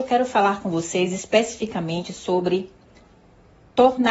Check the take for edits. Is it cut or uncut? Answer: uncut